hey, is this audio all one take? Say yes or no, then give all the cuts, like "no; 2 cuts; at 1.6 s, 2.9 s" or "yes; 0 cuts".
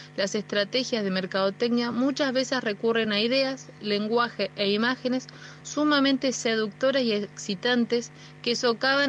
yes; 0 cuts